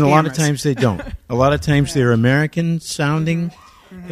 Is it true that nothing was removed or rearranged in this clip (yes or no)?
yes